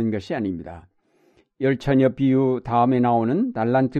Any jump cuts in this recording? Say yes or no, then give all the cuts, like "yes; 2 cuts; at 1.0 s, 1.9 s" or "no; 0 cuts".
no; 0 cuts